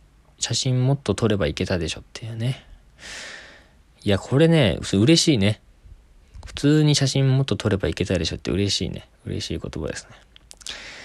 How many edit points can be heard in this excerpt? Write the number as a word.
one